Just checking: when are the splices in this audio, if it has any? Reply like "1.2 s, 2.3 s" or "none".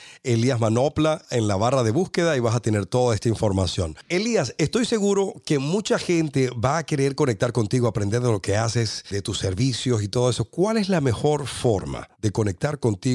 12.1 s